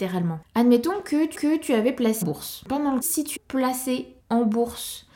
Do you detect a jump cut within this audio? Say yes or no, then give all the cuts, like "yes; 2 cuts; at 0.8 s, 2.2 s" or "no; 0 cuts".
yes; 5 cuts; at 1.3 s, 2.2 s, 3.0 s, 3.4 s, 4.2 s